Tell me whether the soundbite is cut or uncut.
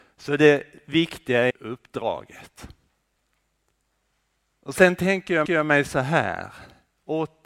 cut